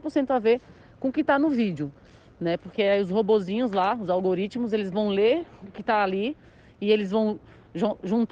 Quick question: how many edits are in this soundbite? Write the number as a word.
zero